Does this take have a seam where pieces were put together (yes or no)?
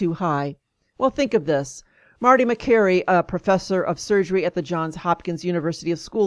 no